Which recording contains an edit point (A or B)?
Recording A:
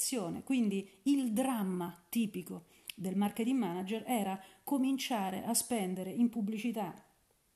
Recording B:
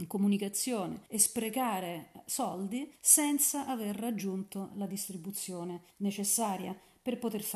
B